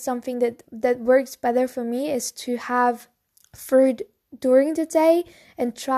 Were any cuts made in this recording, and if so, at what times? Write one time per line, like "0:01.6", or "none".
0:03.3